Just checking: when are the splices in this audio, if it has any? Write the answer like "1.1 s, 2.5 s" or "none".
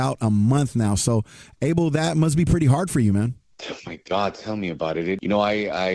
4.0 s